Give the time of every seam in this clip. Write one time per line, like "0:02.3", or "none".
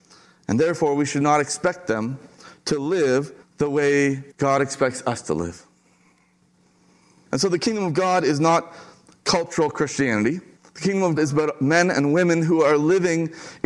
0:04.3
0:10.6
0:11.2